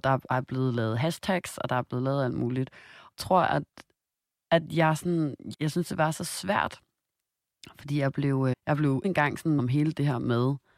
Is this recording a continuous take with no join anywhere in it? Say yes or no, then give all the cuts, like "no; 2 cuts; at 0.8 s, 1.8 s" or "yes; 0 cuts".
no; 5 cuts; at 3.2 s, 5.5 s, 8.5 s, 9.0 s, 9.6 s